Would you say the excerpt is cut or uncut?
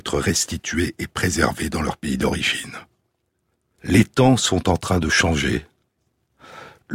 uncut